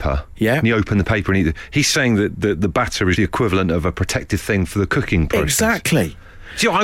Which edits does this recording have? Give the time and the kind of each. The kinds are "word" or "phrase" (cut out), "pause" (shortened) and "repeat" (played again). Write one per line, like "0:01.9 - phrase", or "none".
0:03.2 - word